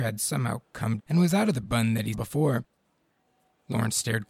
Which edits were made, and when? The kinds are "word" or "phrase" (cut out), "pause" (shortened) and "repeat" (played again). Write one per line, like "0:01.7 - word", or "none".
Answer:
0:01.0 - word
0:01.6 - word
0:02.1 - word